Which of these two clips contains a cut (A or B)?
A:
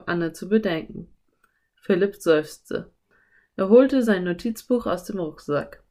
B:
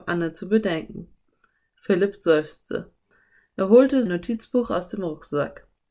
B